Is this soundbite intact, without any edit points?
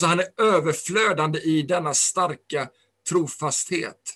yes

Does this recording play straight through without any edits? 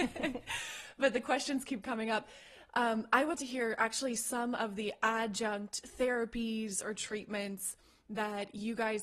no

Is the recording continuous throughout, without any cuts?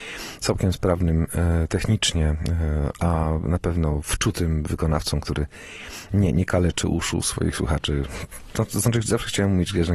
yes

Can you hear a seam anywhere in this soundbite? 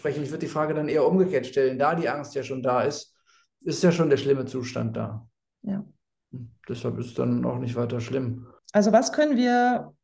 no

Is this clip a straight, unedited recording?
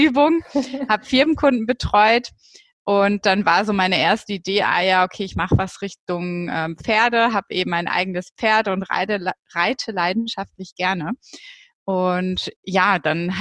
yes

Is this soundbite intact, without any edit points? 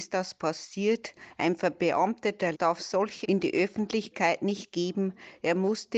no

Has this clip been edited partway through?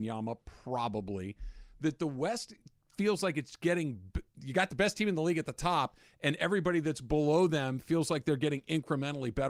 no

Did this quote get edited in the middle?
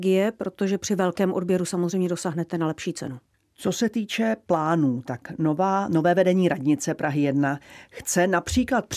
yes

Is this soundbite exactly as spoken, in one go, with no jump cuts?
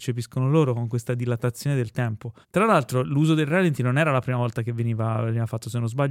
no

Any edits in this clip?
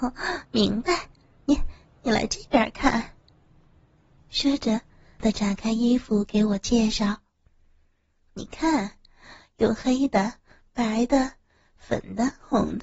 no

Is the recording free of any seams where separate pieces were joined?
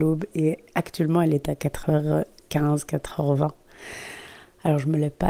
yes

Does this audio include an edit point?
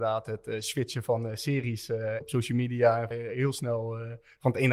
yes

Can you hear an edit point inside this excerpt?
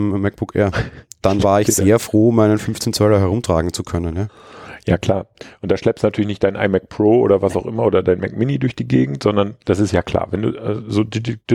no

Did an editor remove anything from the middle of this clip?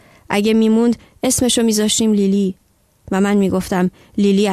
no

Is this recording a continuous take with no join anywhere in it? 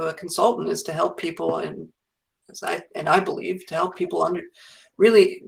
yes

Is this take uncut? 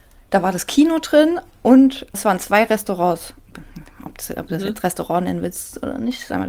no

